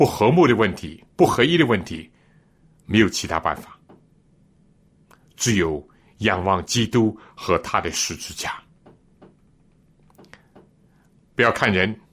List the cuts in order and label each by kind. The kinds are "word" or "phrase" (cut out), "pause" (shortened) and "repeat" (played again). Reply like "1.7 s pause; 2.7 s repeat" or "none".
1.1 s pause